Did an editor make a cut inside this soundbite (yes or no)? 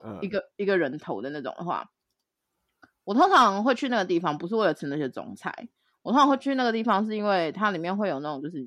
no